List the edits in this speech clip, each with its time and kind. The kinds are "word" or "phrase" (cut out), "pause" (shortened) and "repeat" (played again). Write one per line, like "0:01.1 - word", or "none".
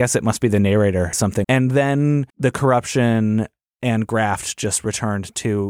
0:01.1 - word
0:01.4 - word
0:02.3 - pause

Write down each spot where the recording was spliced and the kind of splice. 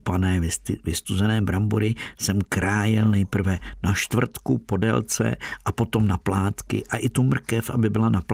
none

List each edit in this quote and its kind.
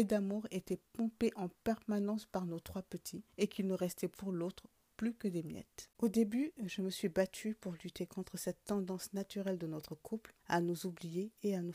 0:03.3 - pause
0:05.9 - pause
0:10.4 - pause

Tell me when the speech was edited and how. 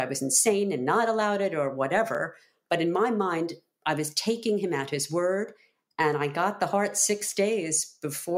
none

